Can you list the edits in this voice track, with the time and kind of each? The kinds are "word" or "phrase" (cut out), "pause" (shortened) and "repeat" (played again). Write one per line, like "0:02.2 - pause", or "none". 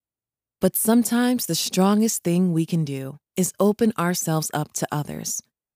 0:03.3 - pause